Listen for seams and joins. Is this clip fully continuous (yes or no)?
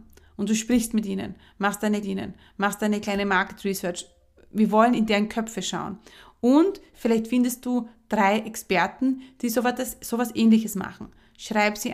no